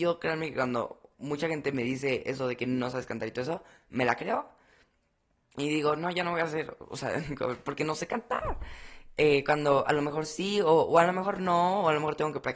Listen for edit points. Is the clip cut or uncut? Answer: uncut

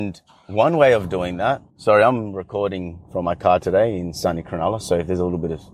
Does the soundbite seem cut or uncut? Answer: cut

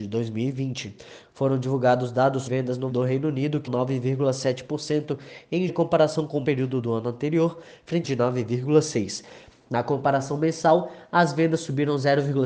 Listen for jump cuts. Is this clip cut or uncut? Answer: cut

